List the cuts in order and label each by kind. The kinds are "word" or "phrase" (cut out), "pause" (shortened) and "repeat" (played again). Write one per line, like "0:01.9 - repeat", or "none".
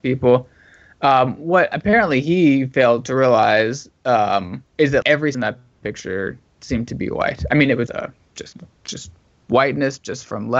0:04.7 - pause
0:05.0 - word
0:05.3 - phrase
0:07.9 - word